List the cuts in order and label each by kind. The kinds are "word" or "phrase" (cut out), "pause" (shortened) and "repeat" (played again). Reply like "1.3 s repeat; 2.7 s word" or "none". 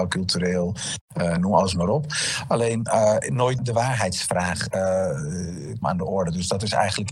1.4 s word; 3.6 s word; 5.8 s word